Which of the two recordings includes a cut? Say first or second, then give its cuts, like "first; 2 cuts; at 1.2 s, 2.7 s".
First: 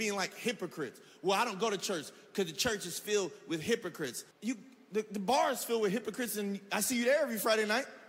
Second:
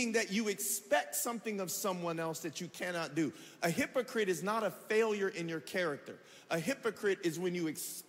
first; 1 cut; at 4.3 s